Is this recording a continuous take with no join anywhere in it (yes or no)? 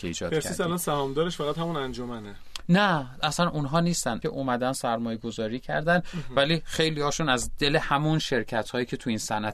no